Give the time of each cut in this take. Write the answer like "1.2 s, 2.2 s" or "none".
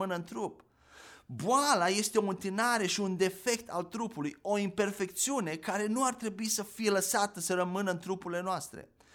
none